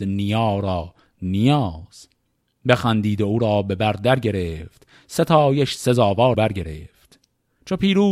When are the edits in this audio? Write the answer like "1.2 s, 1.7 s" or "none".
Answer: 6.3 s